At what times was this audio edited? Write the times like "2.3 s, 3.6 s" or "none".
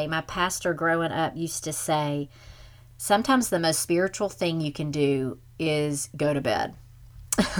none